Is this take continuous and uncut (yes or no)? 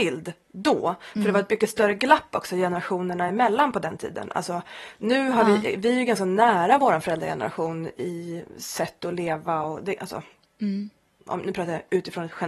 yes